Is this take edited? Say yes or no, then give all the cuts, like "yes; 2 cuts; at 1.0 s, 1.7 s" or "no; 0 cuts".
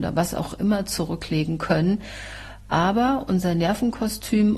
no; 0 cuts